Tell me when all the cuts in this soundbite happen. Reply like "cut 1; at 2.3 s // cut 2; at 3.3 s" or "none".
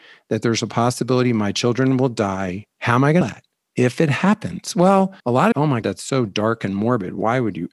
cut 1; at 2.7 s // cut 2; at 3.2 s // cut 3; at 3.6 s // cut 4; at 5.2 s // cut 5; at 5.5 s // cut 6; at 5.8 s